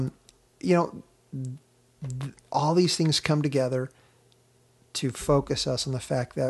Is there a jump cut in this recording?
no; 0 cuts

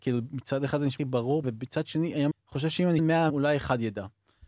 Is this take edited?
yes; 5 cuts; at 1.0 s, 1.4 s, 2.3 s, 3.0 s, 3.3 s

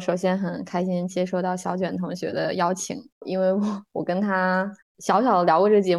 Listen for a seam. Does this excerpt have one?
yes; 1 cut; at 3.9 s

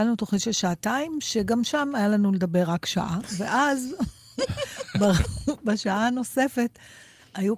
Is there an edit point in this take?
no; 0 cuts

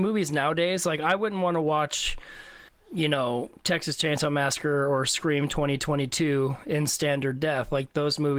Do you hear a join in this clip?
yes; 1 cut; at 2.7 s

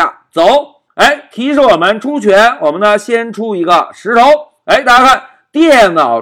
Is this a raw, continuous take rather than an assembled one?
yes; 0 cuts

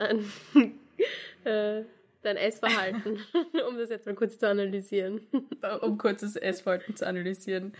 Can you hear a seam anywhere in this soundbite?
no; 0 cuts

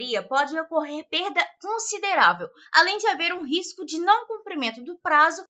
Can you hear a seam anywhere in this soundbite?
no; 0 cuts

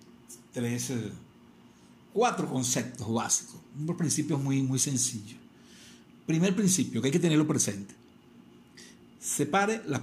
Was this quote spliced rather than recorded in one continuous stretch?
no; 0 cuts

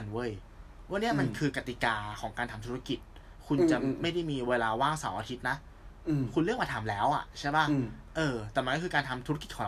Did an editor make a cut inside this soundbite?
no; 0 cuts

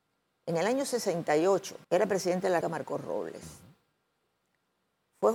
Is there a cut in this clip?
yes; 2 cuts; at 1.8 s, 2.6 s

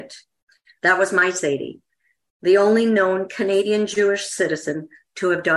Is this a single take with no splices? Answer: yes; 0 cuts

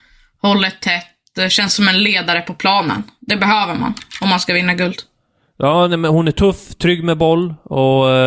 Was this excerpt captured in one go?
yes; 0 cuts

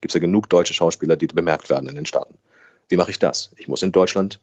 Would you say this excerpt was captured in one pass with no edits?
yes; 0 cuts

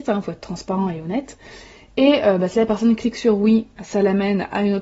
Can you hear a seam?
no; 0 cuts

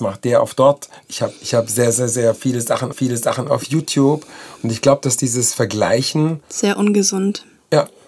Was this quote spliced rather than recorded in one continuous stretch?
yes; 3 cuts; at 1.4 s, 2.9 s, 6.4 s

